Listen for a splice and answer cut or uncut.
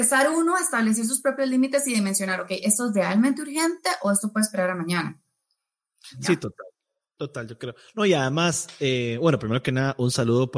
uncut